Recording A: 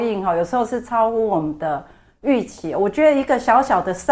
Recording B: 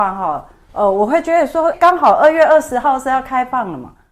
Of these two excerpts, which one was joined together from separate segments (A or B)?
B